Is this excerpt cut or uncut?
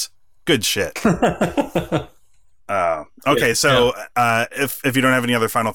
uncut